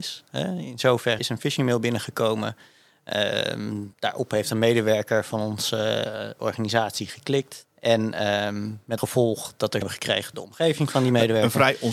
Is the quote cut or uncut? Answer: cut